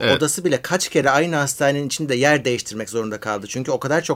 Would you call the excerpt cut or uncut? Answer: uncut